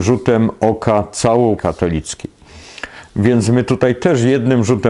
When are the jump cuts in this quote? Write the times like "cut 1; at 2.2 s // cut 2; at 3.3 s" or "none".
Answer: cut 1; at 1.6 s

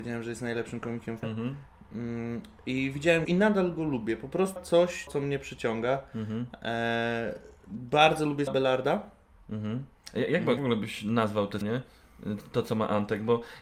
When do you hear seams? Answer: cut 1; at 1.2 s // cut 2; at 3.2 s // cut 3; at 4.6 s // cut 4; at 5.1 s // cut 5; at 8.5 s // cut 6; at 10.6 s // cut 7; at 11.6 s

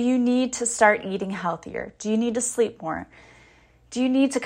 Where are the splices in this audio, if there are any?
none

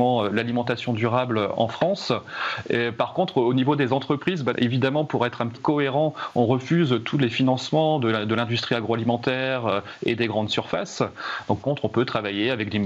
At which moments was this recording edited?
cut 1; at 4.5 s // cut 2; at 5.6 s // cut 3; at 11.6 s

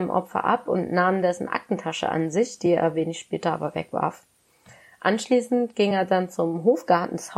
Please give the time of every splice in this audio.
none

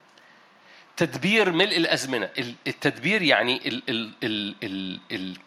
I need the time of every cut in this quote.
none

